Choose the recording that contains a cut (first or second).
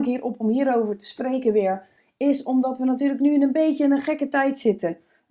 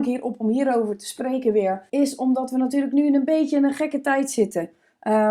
second